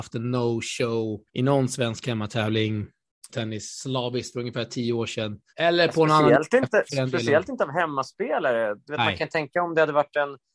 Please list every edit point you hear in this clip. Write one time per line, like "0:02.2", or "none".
0:01.3
0:03.3
0:05.5

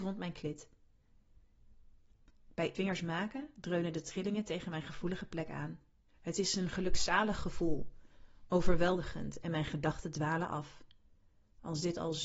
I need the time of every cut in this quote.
0:02.7
0:06.1

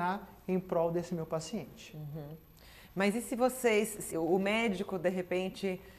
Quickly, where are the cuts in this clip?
0:04.1

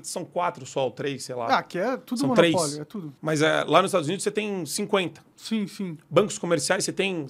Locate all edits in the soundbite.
0:03.2

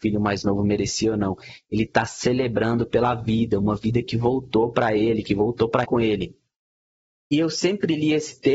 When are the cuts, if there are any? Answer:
0:05.8

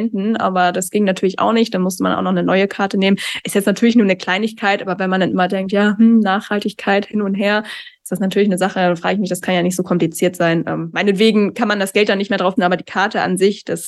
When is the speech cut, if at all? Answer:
0:12.6

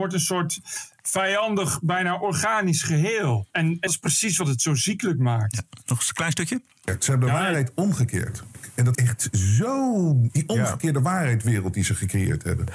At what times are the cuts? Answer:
0:03.5
0:03.9
0:08.9
0:10.3

